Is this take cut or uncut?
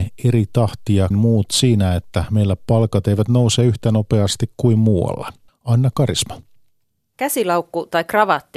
cut